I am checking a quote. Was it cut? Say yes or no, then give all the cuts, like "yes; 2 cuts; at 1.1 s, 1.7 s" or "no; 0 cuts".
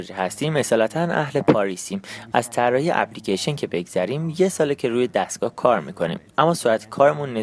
no; 0 cuts